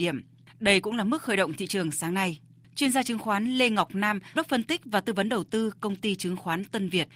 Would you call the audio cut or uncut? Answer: cut